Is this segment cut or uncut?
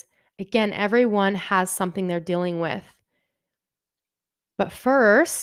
uncut